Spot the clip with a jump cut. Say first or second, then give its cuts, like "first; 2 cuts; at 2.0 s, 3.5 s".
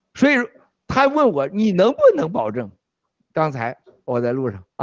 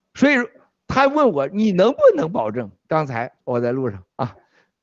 second; 2 cuts; at 2.8 s, 3.4 s